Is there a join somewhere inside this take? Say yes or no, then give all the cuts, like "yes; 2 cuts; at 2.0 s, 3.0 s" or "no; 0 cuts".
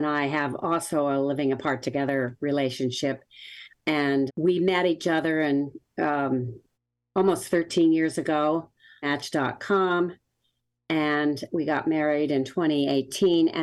yes; 3 cuts; at 4.3 s, 6.7 s, 9.0 s